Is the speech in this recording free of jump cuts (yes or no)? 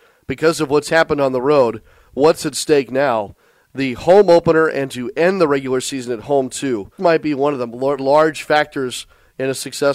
no